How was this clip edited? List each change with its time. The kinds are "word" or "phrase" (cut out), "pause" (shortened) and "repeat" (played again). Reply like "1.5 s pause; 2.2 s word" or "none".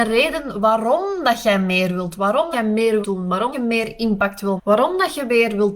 2.5 s word; 3.0 s word; 3.5 s word; 4.6 s word